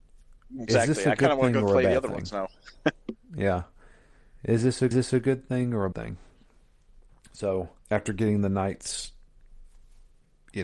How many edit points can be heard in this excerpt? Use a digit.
3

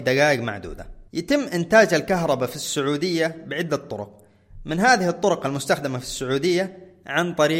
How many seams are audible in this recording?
1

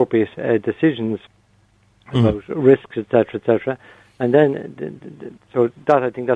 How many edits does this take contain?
0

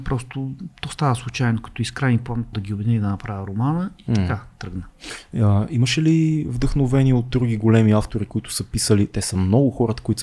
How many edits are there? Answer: 1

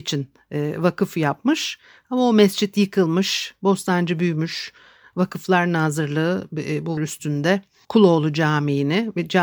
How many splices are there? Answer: 1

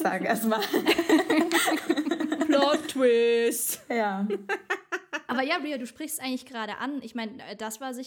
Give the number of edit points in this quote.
0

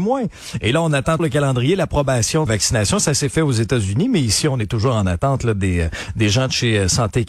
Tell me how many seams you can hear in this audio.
2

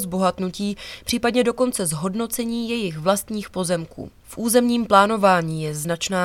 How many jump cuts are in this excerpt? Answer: 1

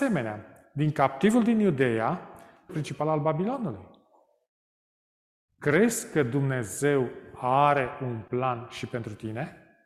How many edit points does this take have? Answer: 1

